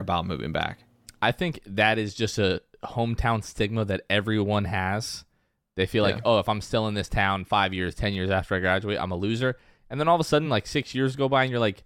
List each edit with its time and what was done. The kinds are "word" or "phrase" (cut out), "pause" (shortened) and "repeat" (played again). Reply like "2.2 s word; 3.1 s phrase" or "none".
none